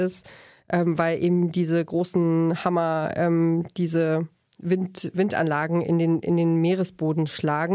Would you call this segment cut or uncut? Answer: uncut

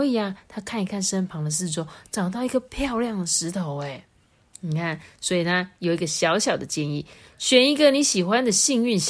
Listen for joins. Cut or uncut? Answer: uncut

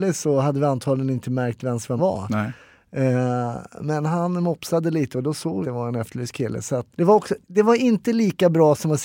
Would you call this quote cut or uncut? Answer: cut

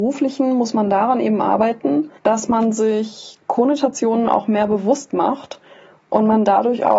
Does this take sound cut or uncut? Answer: cut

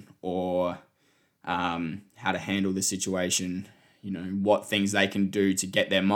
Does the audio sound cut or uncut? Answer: uncut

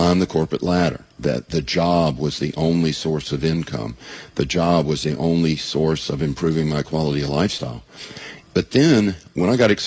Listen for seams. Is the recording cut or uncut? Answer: cut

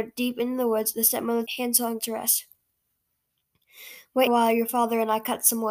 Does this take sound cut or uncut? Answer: cut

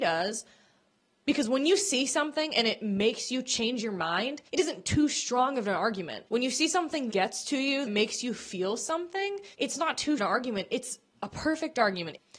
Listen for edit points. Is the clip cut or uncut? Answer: cut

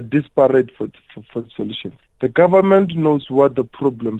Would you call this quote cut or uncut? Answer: cut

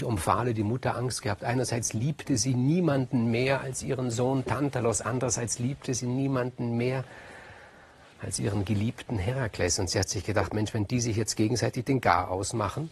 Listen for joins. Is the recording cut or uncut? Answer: uncut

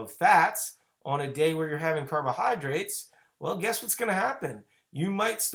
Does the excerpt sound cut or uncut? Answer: uncut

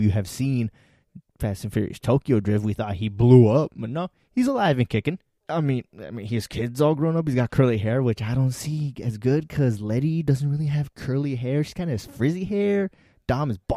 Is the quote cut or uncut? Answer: uncut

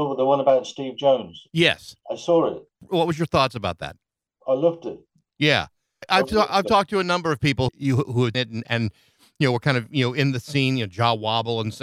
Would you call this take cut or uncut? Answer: cut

